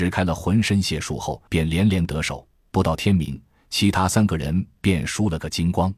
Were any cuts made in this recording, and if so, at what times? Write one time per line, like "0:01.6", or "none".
0:01.5